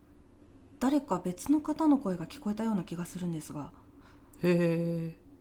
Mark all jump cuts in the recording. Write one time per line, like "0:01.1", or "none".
none